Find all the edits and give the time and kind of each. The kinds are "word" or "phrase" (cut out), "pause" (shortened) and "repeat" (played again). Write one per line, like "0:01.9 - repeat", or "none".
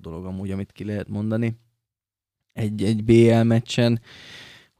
none